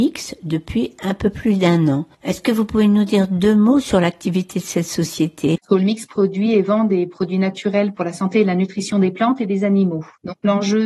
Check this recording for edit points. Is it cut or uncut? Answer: cut